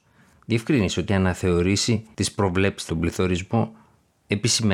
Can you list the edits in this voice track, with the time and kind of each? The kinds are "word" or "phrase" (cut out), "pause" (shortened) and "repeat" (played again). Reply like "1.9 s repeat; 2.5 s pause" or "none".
1.1 s word; 2.9 s word